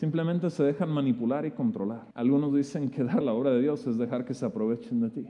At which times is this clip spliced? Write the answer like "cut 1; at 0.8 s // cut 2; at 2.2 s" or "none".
cut 1; at 2.1 s // cut 2; at 3.2 s